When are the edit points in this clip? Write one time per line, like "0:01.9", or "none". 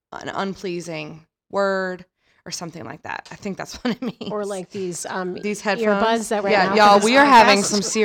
0:06.4